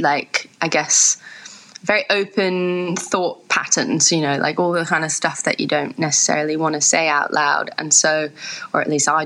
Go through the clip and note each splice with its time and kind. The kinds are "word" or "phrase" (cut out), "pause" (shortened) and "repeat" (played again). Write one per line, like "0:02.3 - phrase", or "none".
none